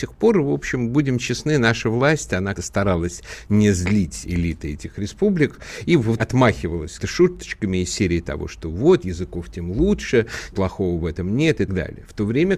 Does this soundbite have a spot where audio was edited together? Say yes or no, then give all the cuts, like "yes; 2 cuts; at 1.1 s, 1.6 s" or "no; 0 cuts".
yes; 6 cuts; at 2.6 s, 6.2 s, 7.0 s, 9.0 s, 10.5 s, 11.7 s